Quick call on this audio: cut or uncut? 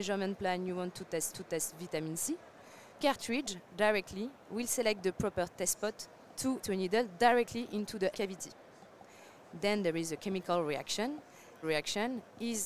cut